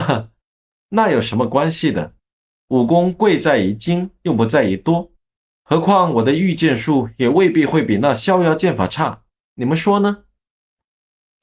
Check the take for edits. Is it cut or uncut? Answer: uncut